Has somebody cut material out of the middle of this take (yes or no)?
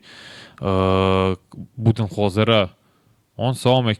no